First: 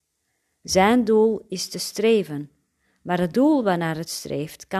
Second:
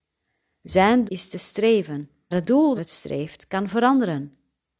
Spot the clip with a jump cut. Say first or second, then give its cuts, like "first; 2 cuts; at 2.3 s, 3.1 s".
second; 3 cuts; at 1.1 s, 2.3 s, 2.8 s